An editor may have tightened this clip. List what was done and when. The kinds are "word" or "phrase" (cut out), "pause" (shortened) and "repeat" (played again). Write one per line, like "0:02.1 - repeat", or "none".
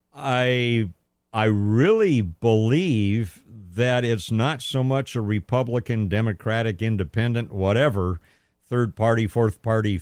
none